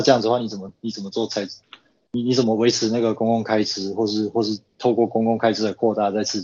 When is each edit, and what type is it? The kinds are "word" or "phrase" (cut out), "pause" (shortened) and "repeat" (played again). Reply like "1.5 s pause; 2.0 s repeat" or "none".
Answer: none